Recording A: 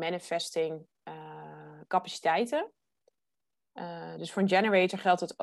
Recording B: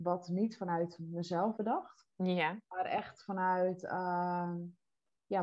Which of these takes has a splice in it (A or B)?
B